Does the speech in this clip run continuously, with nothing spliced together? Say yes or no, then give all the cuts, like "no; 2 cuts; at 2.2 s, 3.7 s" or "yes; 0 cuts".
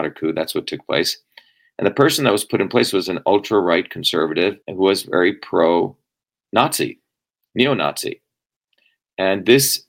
no; 1 cut; at 4.6 s